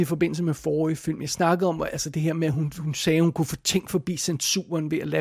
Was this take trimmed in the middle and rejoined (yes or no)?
no